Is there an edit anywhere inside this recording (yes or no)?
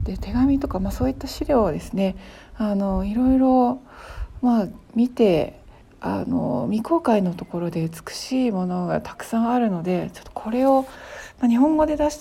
yes